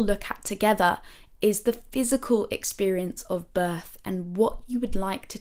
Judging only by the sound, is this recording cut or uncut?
uncut